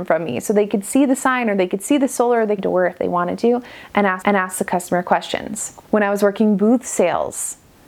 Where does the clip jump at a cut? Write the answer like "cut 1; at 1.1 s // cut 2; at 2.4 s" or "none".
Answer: cut 1; at 2.6 s // cut 2; at 4.2 s